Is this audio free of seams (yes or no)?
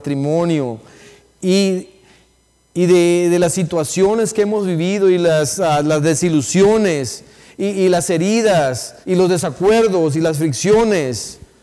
no